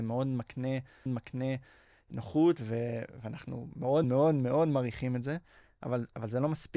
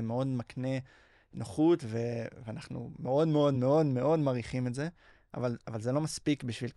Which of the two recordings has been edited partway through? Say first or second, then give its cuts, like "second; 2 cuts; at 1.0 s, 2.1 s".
first; 2 cuts; at 1.1 s, 4.0 s